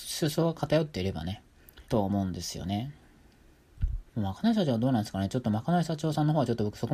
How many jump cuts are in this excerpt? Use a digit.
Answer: 2